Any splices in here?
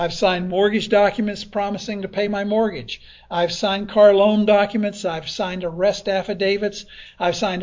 no; 0 cuts

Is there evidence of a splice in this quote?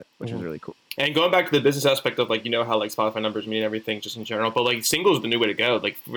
no; 0 cuts

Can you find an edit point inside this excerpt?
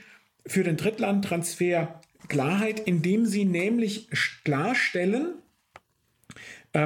no; 0 cuts

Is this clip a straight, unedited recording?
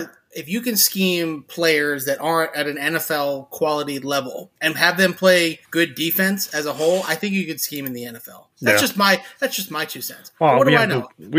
no; 3 cuts; at 4.6 s, 5.6 s, 8.5 s

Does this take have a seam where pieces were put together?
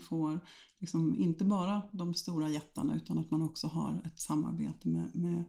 no; 0 cuts

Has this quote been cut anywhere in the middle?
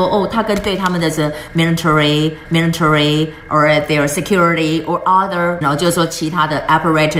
yes; 2 cuts; at 2.4 s, 5.6 s

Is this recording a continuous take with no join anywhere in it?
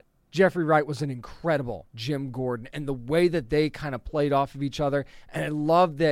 no; 1 cut; at 1.9 s

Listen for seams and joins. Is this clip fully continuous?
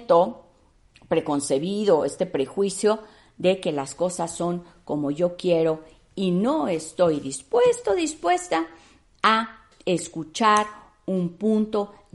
yes; 0 cuts

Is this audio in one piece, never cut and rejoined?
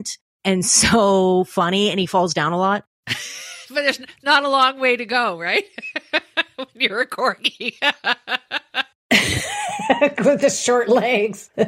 no; 1 cut; at 2.9 s

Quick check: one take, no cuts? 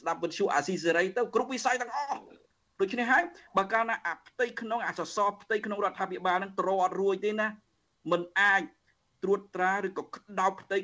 yes; 0 cuts

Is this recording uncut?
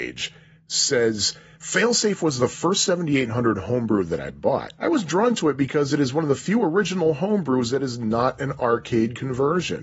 no; 1 cut; at 4.8 s

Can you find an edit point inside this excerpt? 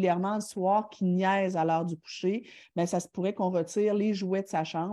no; 0 cuts

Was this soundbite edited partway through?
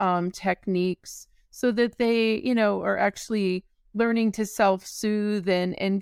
no; 0 cuts

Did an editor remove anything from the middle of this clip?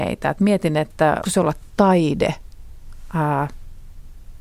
yes; 2 cuts; at 1.2 s, 1.7 s

